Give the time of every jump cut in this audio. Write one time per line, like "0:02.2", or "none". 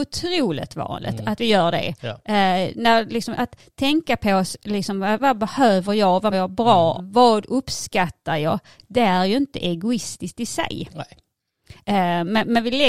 0:05.2
0:06.3
0:07.0